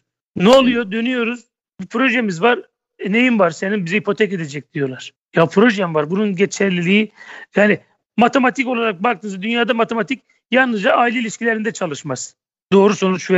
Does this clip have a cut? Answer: no; 0 cuts

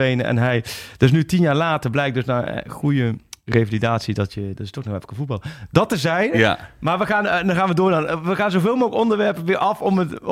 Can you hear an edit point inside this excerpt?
no; 0 cuts

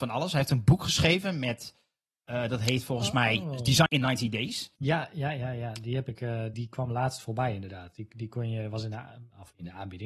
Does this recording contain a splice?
yes; 3 cuts; at 3.9 s, 4.8 s, 6.5 s

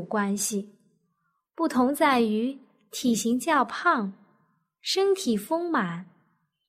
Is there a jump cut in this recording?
no; 0 cuts

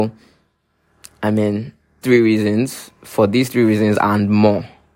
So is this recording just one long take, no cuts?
no; 1 cut; at 2.0 s

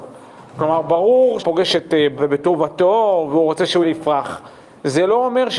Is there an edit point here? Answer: yes; 3 cuts; at 1.4 s, 2.2 s, 3.8 s

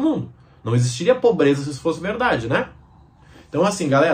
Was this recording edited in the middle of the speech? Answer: no; 0 cuts

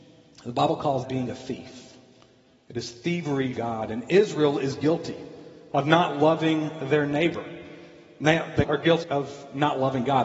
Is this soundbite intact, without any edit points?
no; 4 cuts; at 1.0 s, 3.6 s, 8.6 s, 9.0 s

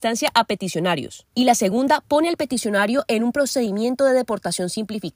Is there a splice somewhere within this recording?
no; 0 cuts

